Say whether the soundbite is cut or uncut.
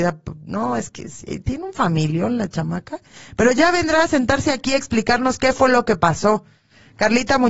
uncut